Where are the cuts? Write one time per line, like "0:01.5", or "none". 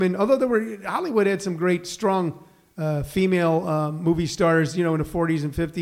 none